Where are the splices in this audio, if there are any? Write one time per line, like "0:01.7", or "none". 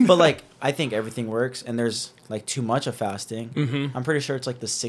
none